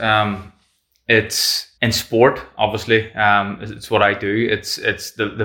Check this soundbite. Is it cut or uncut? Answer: cut